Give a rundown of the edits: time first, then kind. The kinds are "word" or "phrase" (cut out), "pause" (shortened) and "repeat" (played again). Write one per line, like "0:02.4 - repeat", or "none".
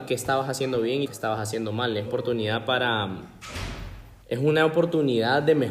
0:01.1 - phrase
0:02.1 - word
0:04.2 - pause